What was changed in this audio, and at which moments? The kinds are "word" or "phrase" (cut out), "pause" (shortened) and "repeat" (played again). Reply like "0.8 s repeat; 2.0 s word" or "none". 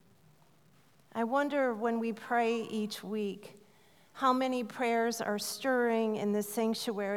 none